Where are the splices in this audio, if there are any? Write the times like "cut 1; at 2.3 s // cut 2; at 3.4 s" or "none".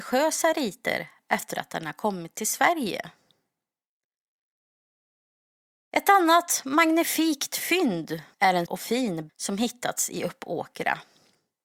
cut 1; at 8.3 s // cut 2; at 8.7 s // cut 3; at 9.3 s